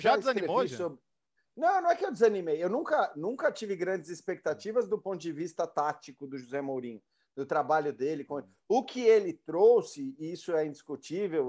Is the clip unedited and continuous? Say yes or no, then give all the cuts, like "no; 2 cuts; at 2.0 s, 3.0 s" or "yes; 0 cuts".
yes; 0 cuts